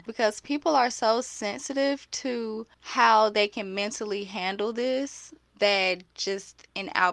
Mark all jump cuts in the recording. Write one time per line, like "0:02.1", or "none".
0:02.7